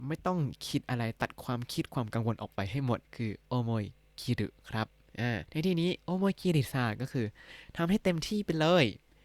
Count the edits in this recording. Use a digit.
2